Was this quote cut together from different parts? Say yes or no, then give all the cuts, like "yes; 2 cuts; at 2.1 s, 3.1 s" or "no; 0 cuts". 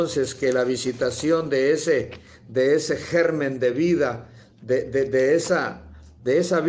no; 0 cuts